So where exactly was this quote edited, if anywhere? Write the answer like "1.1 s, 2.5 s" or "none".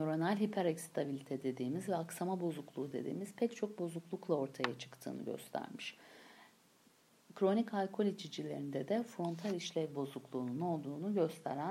none

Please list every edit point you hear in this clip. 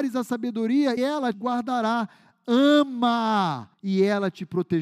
1.0 s, 1.3 s, 3.7 s

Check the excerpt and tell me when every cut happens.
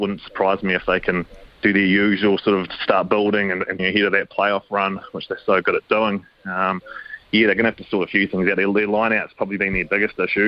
1.5 s, 3.8 s

